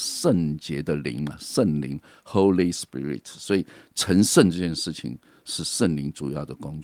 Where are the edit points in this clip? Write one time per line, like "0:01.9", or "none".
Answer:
none

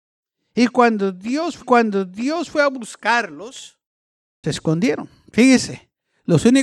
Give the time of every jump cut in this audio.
0:01.6
0:04.4

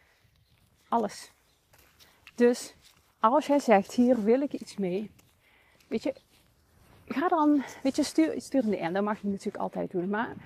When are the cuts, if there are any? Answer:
none

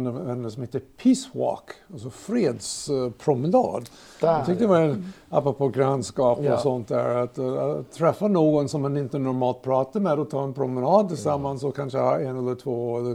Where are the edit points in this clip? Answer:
none

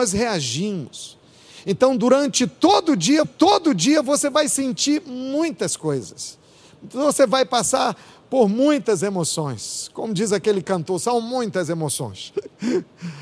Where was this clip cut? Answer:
0:03.2

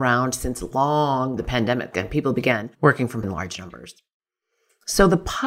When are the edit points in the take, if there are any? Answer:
0:01.4
0:01.9
0:02.7
0:03.2

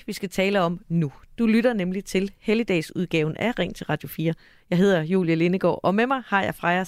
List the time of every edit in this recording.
none

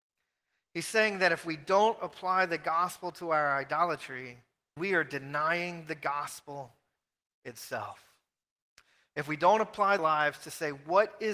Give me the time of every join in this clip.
0:04.8
0:10.0

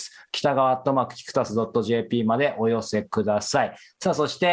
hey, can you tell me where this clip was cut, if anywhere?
none

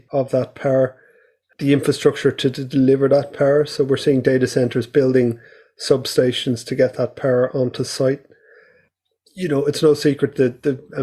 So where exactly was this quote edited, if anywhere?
none

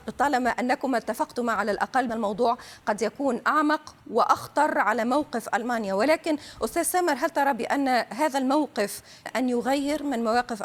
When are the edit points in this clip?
0:02.1
0:04.0
0:09.3

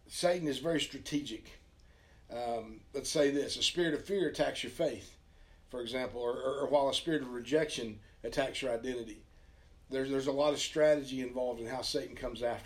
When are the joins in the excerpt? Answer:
none

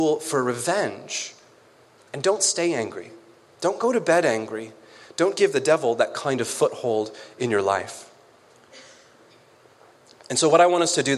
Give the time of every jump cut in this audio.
none

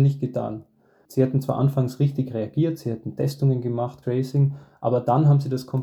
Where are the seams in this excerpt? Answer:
0:04.0

